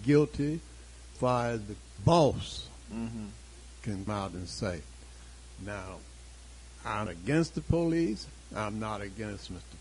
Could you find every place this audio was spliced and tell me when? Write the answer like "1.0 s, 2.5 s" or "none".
1.2 s, 2.0 s, 4.1 s, 7.1 s